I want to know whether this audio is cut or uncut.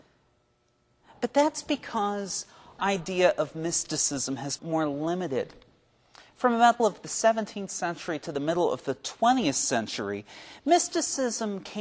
cut